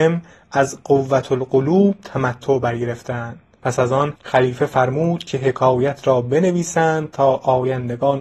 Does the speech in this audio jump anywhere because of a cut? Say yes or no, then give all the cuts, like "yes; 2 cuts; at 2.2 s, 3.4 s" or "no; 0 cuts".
yes; 1 cut; at 4.2 s